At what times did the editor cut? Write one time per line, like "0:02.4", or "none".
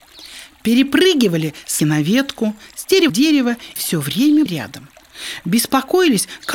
0:01.8
0:03.1
0:03.8
0:04.5

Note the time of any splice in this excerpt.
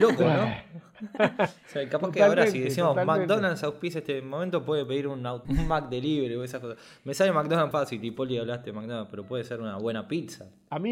0:05.4
0:07.7

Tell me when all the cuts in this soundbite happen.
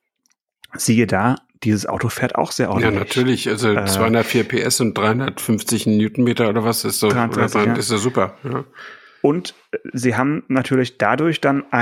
none

